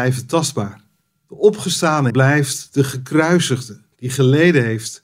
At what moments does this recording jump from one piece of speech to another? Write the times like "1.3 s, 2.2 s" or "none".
1.0 s, 2.1 s, 3.9 s